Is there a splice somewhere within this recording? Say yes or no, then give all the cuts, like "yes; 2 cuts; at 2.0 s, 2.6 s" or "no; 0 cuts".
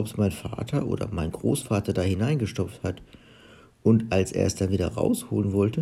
no; 0 cuts